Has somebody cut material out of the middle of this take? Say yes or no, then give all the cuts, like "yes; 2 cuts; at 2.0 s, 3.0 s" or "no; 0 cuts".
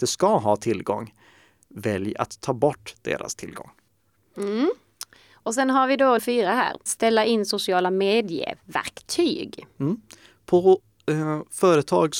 yes; 2 cuts; at 6.2 s, 6.9 s